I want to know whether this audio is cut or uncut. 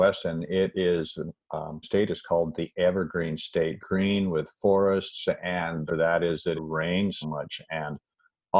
cut